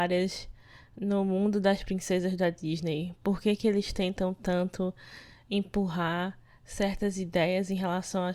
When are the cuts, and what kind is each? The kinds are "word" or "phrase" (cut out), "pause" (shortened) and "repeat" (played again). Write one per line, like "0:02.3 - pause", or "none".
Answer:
none